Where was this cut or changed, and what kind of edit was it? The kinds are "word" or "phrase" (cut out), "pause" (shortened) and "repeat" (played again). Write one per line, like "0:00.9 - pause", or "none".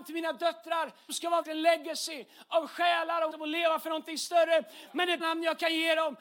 0:01.1 - word
0:01.4 - word
0:03.3 - word
0:05.2 - word